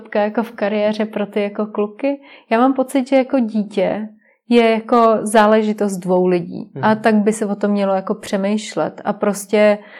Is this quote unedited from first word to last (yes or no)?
yes